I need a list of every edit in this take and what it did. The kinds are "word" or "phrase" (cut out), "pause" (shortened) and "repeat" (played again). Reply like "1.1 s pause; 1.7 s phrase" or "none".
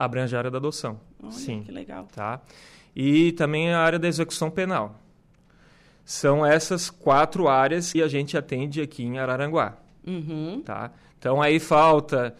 7.9 s word